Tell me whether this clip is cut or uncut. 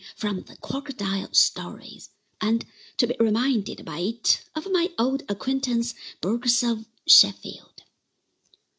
uncut